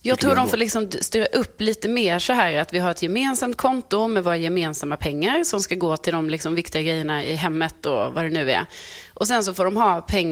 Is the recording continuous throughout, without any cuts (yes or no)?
yes